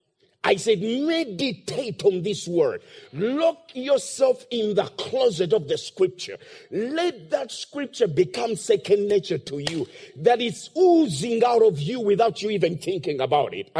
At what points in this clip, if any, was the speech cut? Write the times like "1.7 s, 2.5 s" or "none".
none